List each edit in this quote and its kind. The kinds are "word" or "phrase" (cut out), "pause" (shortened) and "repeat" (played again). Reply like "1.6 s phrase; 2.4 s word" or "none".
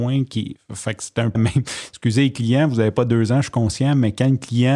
1.3 s word